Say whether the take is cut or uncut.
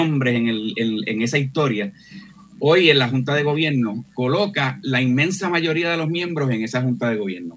uncut